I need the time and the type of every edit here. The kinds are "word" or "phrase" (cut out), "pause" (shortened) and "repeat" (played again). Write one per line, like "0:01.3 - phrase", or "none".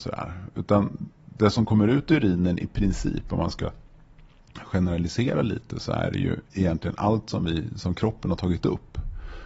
0:06.4 - pause